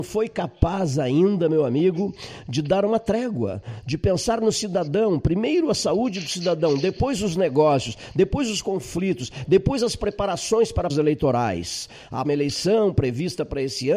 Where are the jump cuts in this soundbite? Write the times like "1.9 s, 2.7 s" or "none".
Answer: 10.9 s, 12.2 s